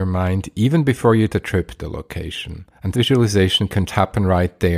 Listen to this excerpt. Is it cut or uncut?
cut